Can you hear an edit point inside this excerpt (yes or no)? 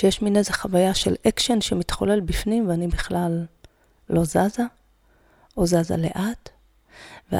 no